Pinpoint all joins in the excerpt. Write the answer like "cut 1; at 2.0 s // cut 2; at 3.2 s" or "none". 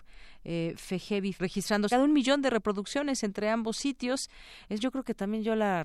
cut 1; at 1.4 s // cut 2; at 1.9 s // cut 3; at 4.8 s